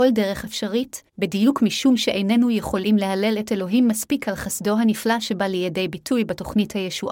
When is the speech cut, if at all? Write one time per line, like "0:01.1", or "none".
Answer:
0:01.1